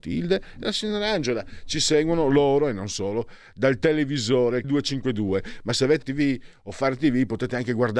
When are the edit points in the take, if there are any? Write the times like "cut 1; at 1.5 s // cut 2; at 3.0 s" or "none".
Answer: cut 1; at 4.6 s // cut 2; at 6.0 s